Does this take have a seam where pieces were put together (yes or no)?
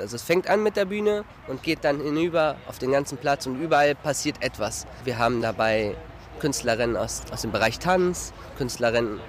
no